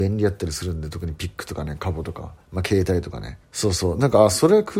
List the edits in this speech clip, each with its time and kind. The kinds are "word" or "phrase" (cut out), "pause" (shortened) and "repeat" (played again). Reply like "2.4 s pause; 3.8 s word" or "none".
2.4 s pause; 3.4 s pause